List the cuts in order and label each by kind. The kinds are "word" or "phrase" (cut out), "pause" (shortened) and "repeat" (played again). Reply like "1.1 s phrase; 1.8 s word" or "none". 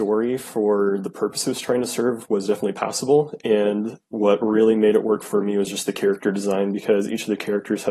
4.1 s pause